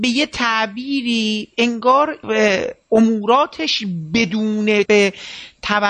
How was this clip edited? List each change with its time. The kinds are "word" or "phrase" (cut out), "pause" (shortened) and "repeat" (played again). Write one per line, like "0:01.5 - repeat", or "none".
0:04.9 - word